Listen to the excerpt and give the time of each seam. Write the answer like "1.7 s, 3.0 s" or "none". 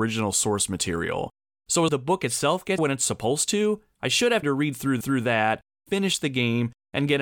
1.9 s, 2.8 s, 4.4 s, 5.0 s